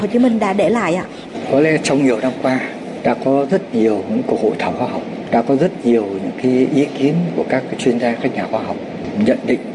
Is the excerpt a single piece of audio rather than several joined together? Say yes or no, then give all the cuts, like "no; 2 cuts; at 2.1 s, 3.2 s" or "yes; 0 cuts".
yes; 0 cuts